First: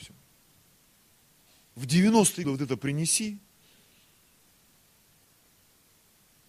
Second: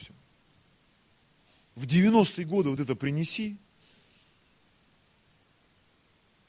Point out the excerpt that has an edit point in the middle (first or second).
first